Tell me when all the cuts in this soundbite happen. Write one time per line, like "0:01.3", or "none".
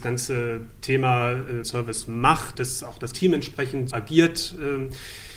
0:01.6
0:02.5
0:03.1
0:03.9